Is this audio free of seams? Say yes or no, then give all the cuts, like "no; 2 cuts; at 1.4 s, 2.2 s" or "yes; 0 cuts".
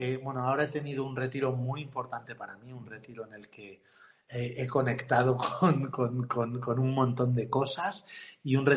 yes; 0 cuts